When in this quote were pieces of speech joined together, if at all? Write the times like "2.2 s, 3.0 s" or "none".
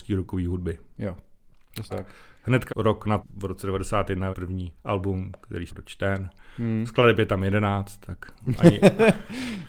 1.9 s, 2.7 s, 3.2 s, 4.3 s, 4.8 s, 5.7 s